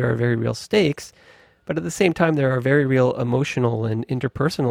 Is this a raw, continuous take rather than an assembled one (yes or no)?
yes